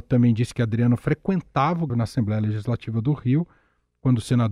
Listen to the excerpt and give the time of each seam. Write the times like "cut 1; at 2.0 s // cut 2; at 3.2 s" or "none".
cut 1; at 1.9 s